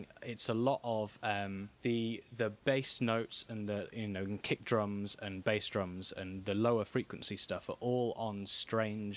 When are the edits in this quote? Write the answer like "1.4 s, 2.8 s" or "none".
1.7 s, 2.6 s